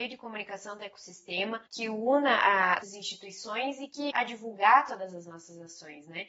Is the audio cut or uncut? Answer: cut